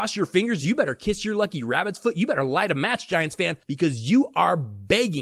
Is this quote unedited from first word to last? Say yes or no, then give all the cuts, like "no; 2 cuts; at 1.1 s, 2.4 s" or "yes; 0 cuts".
yes; 0 cuts